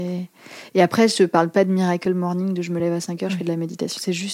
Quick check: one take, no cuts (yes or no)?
yes